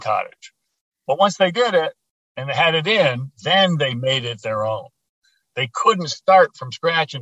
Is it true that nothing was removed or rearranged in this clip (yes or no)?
yes